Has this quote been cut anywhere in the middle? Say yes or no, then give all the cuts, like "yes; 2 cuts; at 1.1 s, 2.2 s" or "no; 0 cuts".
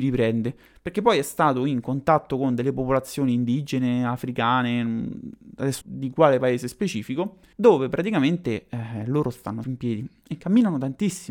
yes; 3 cuts; at 5.8 s, 7.5 s, 9.6 s